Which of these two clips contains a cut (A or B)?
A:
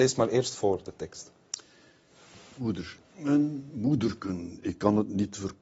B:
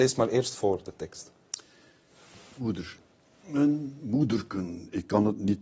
A